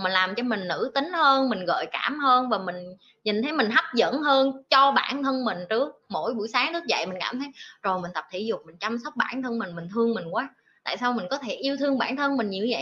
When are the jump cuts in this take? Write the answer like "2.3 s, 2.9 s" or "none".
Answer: none